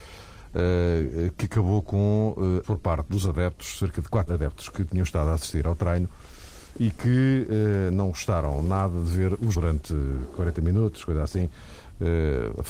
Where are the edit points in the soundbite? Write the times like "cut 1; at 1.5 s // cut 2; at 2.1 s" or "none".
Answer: cut 1; at 2.6 s // cut 2; at 4.3 s // cut 3; at 9.5 s